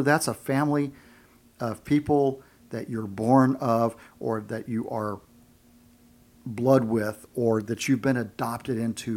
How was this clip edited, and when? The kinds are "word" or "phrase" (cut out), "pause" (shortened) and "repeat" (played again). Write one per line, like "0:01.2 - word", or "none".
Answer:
none